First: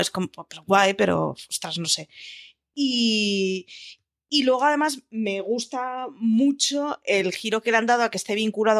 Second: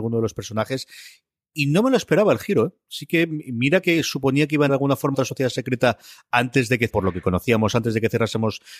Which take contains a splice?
second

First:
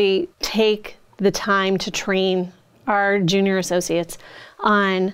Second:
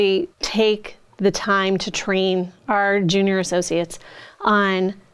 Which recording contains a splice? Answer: second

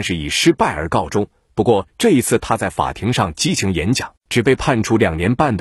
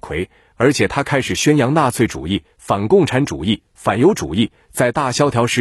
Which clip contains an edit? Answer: first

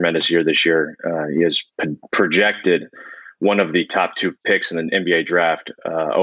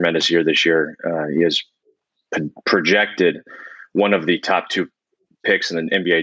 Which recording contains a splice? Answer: first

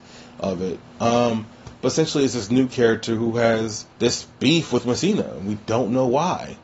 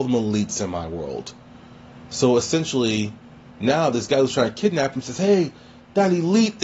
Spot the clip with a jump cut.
first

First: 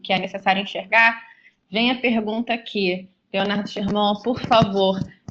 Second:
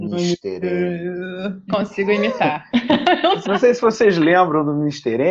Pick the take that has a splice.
second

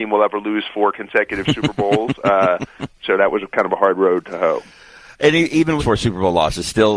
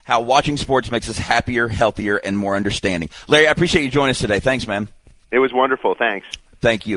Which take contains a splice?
first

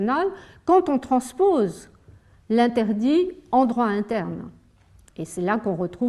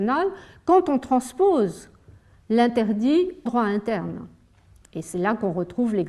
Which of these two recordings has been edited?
second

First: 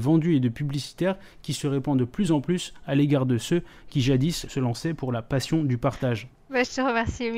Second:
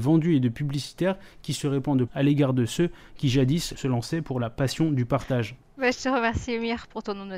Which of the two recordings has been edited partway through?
second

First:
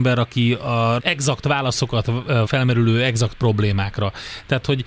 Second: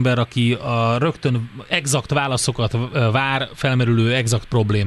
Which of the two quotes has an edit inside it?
first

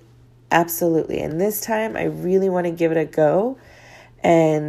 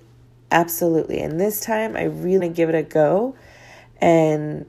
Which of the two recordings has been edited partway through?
second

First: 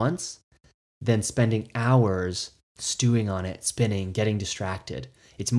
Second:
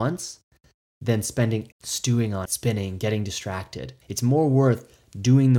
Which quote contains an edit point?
second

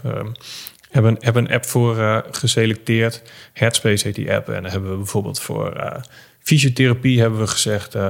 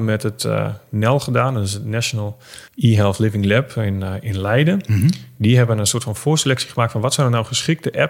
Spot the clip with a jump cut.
second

